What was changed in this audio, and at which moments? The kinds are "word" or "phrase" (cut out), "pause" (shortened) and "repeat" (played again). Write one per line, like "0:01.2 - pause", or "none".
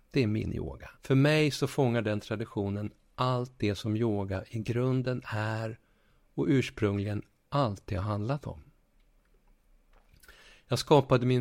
0:00.9 - pause